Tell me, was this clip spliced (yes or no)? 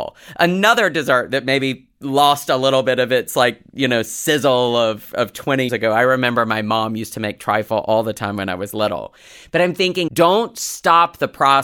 yes